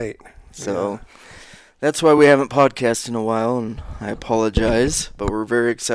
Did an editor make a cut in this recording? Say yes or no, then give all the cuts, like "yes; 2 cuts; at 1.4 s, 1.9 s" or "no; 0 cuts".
no; 0 cuts